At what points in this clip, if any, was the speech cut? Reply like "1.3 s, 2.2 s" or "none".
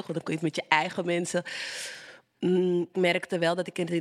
2.9 s